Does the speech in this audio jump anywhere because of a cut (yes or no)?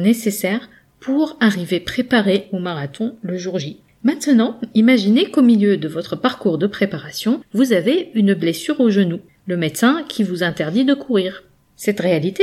no